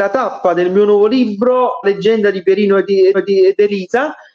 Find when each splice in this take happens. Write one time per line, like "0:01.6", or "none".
0:01.8
0:03.1